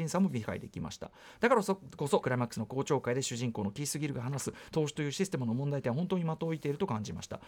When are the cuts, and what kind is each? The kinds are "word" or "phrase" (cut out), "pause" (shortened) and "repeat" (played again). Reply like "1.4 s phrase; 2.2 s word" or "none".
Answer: 2.2 s phrase